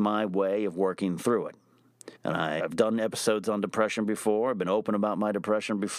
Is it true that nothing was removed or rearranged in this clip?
no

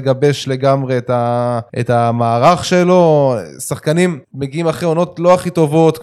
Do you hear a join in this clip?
yes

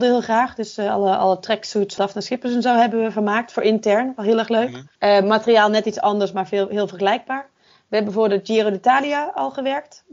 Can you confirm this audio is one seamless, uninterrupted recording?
no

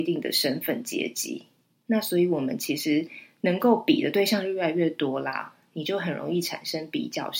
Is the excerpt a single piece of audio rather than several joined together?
yes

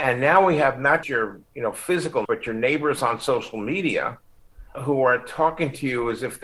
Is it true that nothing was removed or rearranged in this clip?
no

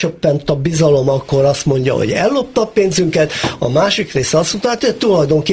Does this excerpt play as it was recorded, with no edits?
yes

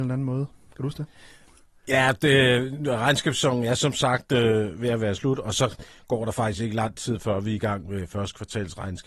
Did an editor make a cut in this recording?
no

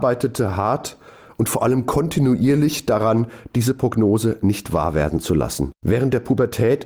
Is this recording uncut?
yes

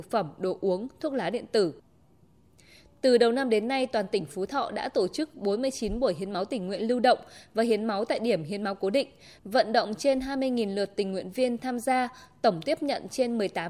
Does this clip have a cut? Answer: no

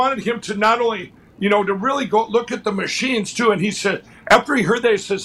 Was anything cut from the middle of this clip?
no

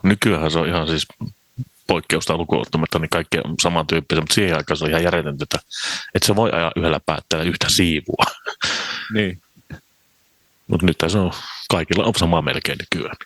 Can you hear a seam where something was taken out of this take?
no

